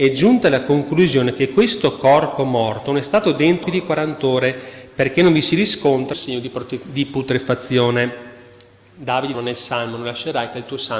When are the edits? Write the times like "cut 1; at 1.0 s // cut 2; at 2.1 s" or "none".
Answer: cut 1; at 3.6 s // cut 2; at 6.1 s // cut 3; at 9.3 s